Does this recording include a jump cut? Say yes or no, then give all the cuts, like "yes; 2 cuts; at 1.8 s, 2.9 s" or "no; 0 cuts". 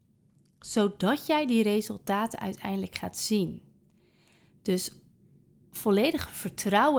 no; 0 cuts